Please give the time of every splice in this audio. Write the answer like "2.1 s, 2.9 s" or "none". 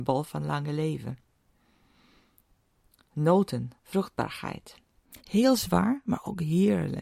3.8 s